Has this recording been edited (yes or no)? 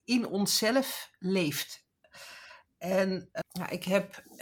yes